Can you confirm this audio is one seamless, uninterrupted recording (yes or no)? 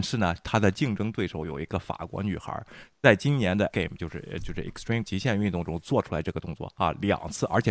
no